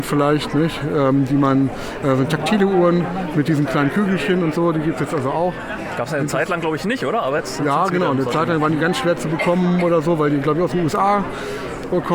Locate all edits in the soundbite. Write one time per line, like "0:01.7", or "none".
none